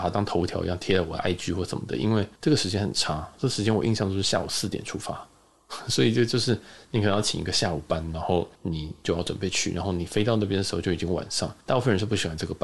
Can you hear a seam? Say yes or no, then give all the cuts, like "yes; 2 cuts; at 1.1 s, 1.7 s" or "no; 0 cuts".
yes; 3 cuts; at 2.4 s, 8.5 s, 11.6 s